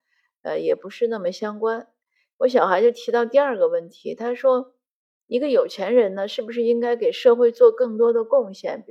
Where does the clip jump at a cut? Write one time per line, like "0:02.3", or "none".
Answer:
none